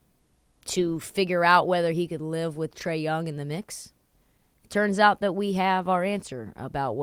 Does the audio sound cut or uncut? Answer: uncut